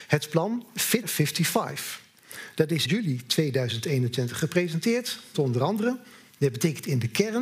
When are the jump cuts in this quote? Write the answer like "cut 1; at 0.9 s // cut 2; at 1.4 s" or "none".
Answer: cut 1; at 1.0 s // cut 2; at 2.9 s // cut 3; at 5.3 s